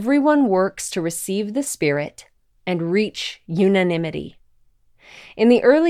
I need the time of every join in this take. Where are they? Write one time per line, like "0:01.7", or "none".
none